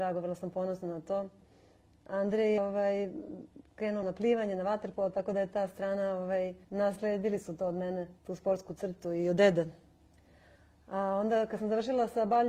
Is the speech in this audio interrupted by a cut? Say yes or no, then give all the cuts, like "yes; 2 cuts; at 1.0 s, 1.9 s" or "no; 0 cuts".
yes; 4 cuts; at 2.6 s, 4.0 s, 6.6 s, 8.2 s